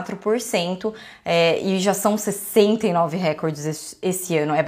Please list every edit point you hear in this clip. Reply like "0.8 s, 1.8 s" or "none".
none